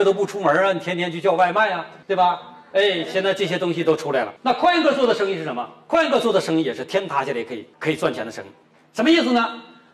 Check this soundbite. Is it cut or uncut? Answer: cut